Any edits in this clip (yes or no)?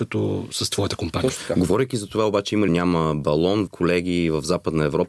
yes